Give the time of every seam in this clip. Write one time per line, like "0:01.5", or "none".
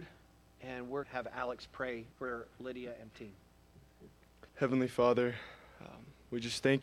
0:01.0
0:02.1
0:03.1
0:04.5